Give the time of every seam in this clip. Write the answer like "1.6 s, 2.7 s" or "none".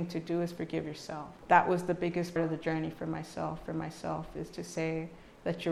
1.4 s, 2.4 s, 3.7 s